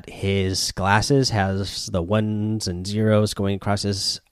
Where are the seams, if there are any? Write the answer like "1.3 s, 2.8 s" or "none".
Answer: none